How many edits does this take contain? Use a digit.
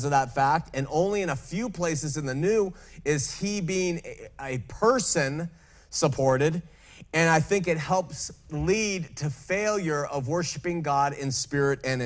0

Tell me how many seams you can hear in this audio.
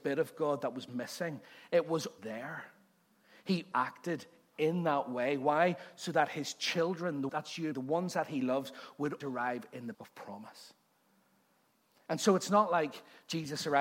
6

